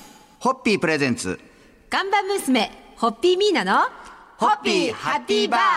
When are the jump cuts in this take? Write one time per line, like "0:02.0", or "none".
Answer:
none